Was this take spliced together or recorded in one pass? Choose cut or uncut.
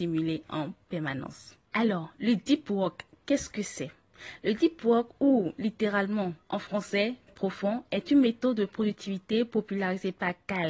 cut